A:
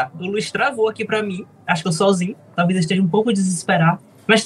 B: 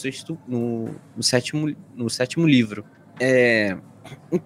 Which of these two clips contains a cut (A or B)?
A